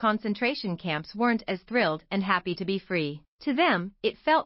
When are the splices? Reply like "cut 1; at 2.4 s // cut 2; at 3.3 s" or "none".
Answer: cut 1; at 3.3 s